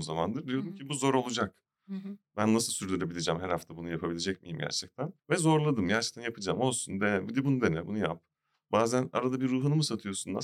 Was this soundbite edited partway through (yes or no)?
yes